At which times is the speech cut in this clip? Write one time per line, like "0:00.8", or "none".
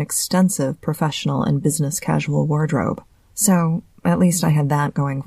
0:03.1